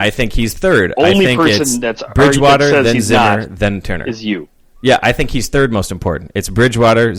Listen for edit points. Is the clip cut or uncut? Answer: uncut